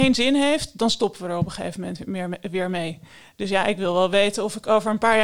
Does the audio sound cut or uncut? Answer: uncut